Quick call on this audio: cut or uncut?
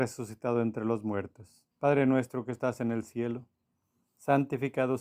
cut